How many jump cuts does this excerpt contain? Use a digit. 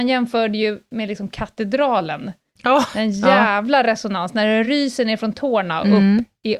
0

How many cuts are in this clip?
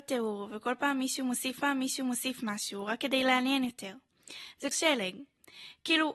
2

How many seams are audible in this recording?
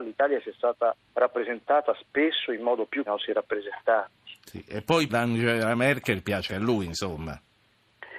4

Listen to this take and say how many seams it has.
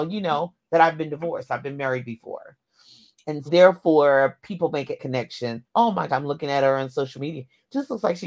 4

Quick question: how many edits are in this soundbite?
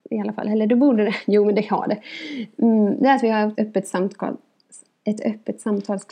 1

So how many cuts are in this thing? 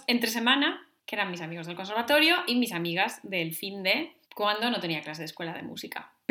2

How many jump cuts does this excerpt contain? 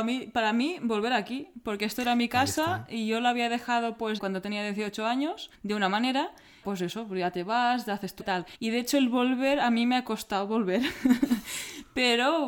5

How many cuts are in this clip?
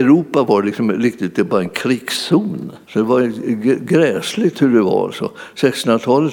1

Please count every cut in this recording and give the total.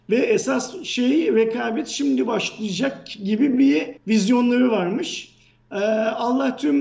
1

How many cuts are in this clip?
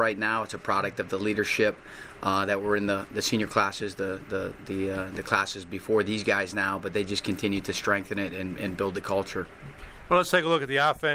0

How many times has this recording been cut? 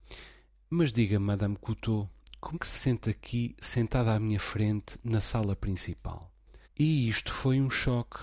2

